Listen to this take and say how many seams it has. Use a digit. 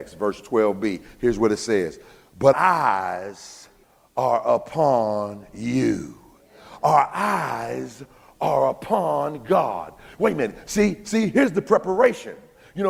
2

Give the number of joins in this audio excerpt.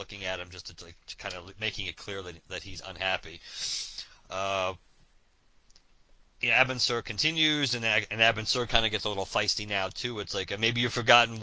0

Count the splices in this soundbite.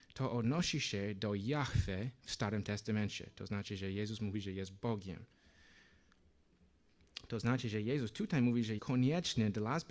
1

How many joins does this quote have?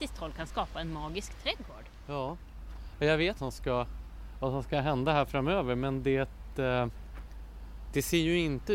1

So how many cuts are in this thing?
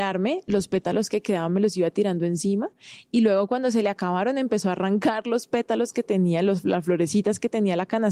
0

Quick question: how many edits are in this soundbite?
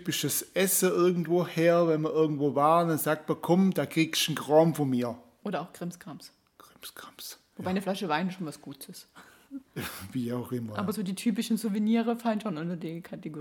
1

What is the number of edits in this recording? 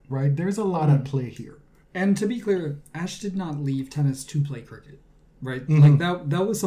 0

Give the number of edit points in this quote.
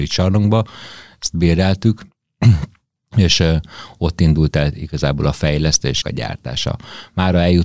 1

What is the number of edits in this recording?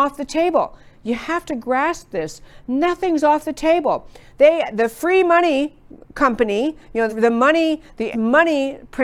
2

